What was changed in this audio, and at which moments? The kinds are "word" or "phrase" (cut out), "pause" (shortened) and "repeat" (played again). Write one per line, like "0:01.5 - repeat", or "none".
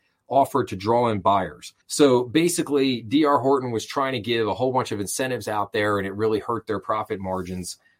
0:01.8 - pause